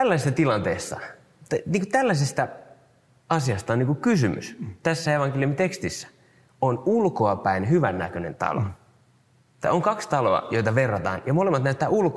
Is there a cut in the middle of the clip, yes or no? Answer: no